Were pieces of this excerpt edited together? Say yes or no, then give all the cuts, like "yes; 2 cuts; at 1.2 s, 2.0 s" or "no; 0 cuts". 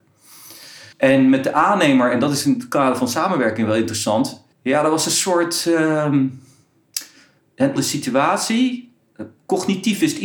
yes; 3 cuts; at 0.9 s, 4.5 s, 7.8 s